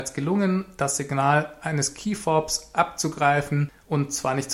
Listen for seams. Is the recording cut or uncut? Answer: uncut